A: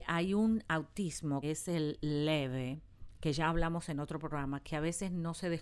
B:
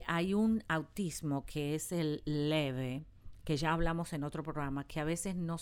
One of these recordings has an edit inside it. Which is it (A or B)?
A